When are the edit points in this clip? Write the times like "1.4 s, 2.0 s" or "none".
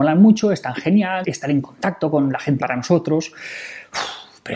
1.2 s, 2.6 s